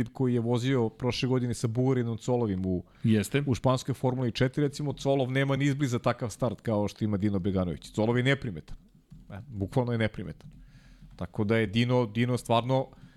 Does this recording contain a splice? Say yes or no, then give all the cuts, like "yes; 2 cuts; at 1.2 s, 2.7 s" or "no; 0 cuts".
no; 0 cuts